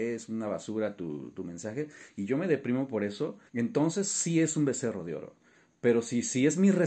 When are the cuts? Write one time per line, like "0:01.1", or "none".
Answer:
0:03.5